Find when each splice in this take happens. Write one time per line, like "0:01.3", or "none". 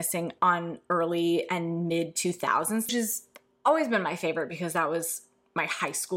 0:02.9